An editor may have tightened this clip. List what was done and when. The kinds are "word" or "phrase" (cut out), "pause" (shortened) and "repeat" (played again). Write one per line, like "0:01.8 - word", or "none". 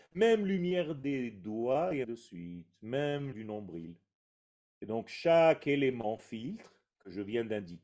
0:02.0 - word
0:03.3 - word
0:04.3 - pause

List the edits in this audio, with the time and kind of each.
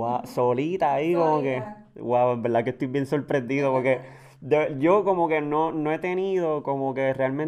none

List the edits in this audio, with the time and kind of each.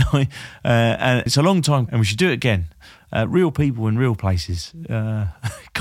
0:01.3 - word
0:01.9 - word

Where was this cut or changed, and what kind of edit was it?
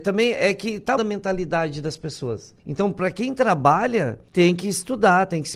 0:01.0 - word
0:02.6 - pause
0:04.3 - pause

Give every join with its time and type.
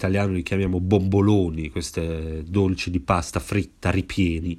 none

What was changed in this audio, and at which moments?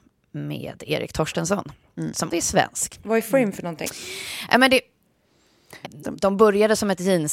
0:02.3 - word
0:05.8 - word

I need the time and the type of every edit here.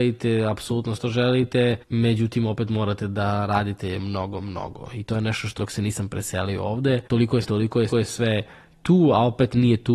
0:01.0 - word
0:01.8 - pause
0:04.0 - word
0:05.6 - phrase
0:07.1 - pause
0:07.4 - phrase
0:07.9 - repeat

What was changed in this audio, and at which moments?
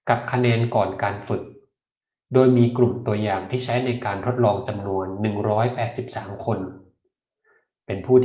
none

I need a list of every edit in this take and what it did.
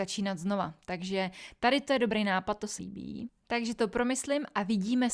0:02.8 - word

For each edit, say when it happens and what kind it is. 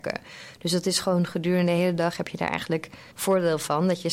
0:03.1 - pause

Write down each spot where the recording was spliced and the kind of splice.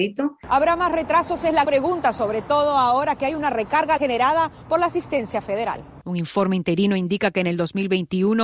0:01.6 - word
0:04.0 - word

